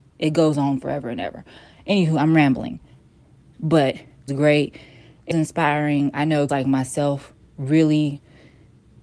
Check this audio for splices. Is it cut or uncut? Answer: cut